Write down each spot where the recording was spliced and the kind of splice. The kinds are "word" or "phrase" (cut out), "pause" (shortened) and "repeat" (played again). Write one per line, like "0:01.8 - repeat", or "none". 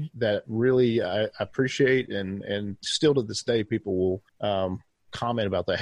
0:04.3 - pause